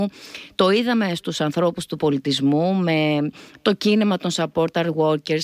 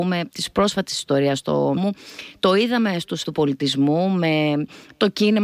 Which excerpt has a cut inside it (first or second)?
second